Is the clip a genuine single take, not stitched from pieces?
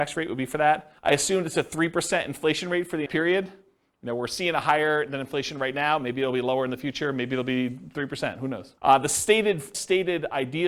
no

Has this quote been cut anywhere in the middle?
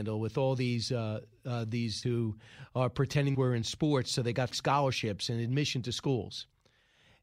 yes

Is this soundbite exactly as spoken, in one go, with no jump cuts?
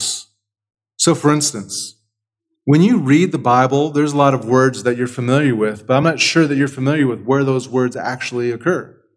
yes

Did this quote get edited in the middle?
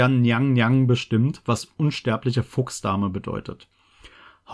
no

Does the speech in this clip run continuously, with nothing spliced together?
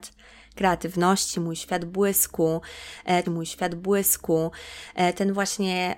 no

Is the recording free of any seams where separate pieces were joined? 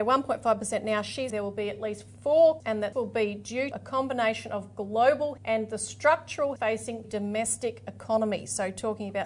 no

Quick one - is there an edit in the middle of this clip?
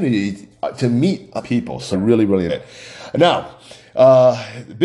yes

